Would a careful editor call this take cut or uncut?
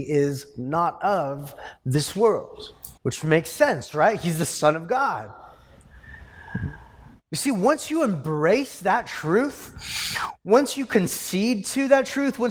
cut